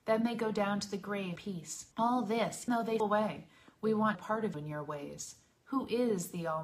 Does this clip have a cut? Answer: yes; 6 cuts; at 1.4 s, 1.9 s, 2.7 s, 3.0 s, 4.1 s, 4.5 s

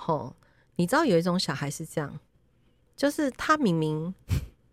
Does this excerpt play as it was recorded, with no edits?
yes; 0 cuts

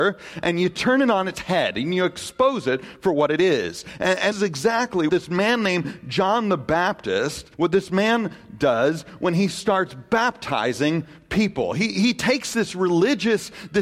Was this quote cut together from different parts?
yes; 3 cuts; at 4.3 s, 5.1 s, 7.5 s

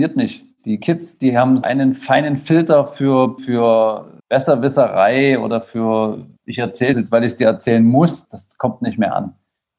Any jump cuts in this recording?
yes; 6 cuts; at 1.6 s, 3.4 s, 4.2 s, 6.4 s, 6.9 s, 8.2 s

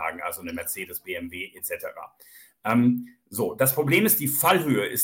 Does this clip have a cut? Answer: no; 0 cuts

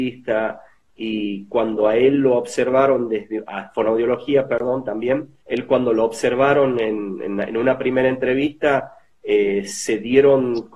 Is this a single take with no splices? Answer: no; 1 cut; at 5.4 s

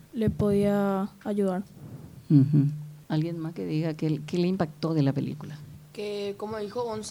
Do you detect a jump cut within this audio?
yes; 1 cut; at 3.0 s

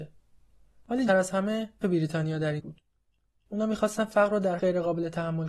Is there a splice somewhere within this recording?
yes; 4 cuts; at 1.1 s, 1.8 s, 2.6 s, 4.6 s

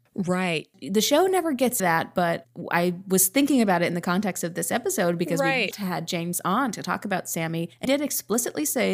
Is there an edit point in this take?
yes; 3 cuts; at 1.8 s, 5.7 s, 7.8 s

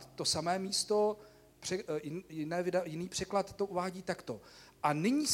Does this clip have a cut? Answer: no; 0 cuts

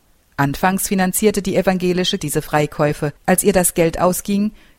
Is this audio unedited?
no; 2 cuts; at 2.2 s, 3.2 s

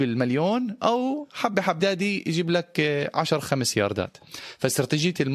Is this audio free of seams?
no; 1 cut; at 1.8 s

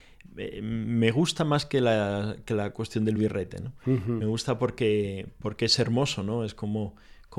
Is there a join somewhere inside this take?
no; 0 cuts

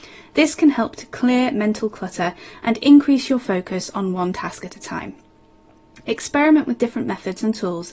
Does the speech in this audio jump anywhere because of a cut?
no; 0 cuts

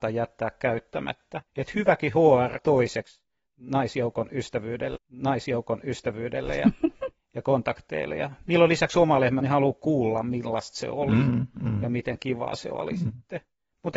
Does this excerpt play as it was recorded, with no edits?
no; 4 cuts; at 1.5 s, 2.6 s, 4.9 s, 9.4 s

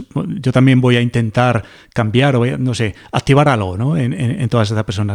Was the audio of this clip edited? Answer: no; 0 cuts

